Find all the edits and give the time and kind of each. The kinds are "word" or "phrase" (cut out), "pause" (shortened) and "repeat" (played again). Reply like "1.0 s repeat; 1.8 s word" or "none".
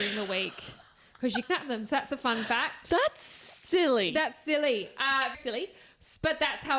1.4 s word; 5.3 s word